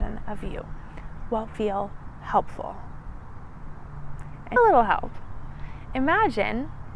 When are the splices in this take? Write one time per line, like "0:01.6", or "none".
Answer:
0:01.5
0:04.6